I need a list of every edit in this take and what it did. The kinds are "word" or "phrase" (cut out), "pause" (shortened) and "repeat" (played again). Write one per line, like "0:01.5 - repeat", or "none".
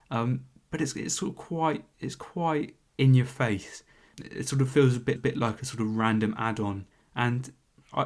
0:02.9 - pause
0:05.2 - repeat
0:06.9 - pause